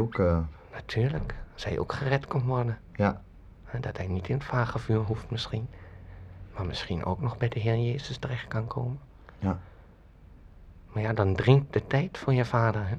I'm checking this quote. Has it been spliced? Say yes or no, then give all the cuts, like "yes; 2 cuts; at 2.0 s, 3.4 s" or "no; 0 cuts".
no; 0 cuts